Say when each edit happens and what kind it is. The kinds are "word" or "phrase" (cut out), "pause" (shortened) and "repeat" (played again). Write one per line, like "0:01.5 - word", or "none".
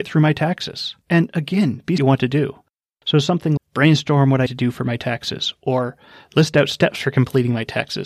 0:01.0 - pause
0:02.0 - phrase
0:03.6 - word
0:04.5 - word

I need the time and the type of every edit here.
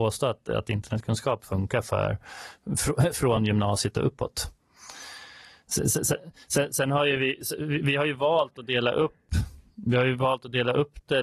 none

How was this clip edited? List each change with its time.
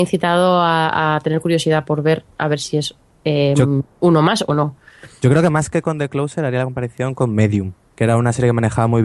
none

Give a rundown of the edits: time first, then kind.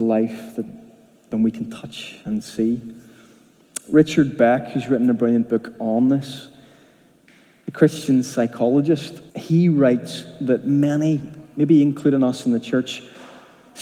0:02.2 - pause
0:09.3 - pause

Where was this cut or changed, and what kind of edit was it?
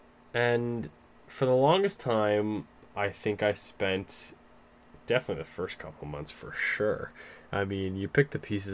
none

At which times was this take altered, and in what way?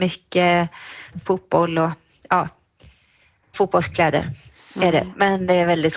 0:01.1 - word
0:03.5 - word

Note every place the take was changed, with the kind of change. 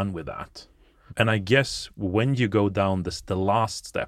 none

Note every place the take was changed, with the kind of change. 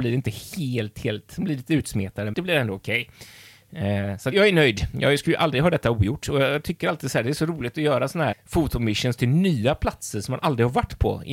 0:02.3 - word
0:04.3 - word
0:08.3 - word

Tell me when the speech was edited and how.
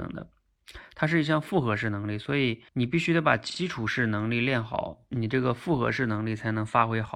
0:02.7 - pause

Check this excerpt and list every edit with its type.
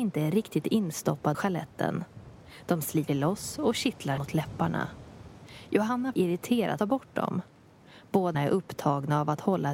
0:01.3 - word
0:03.1 - word
0:04.2 - phrase
0:06.1 - word
0:06.8 - word
0:08.3 - word

